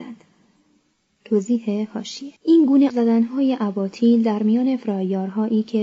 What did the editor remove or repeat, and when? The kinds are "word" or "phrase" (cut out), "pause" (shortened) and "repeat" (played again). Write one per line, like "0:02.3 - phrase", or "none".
0:02.4 - pause
0:02.9 - word